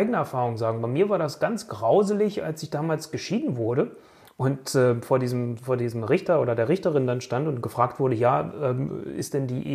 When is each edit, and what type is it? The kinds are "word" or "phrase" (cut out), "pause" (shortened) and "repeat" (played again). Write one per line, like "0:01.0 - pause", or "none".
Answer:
none